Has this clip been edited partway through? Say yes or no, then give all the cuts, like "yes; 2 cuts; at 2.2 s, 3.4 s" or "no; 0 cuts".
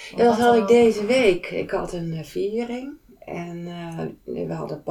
no; 0 cuts